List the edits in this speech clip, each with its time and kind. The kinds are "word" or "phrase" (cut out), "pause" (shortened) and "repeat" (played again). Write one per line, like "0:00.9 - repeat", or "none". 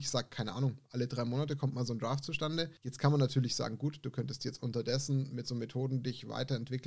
0:02.8 - pause